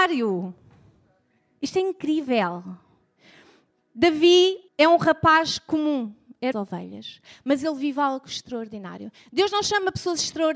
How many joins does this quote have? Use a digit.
2